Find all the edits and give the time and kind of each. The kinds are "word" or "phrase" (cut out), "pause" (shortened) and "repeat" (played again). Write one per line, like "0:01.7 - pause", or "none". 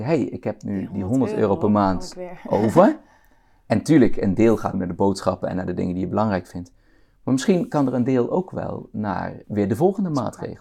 0:04.7 - word
0:09.4 - word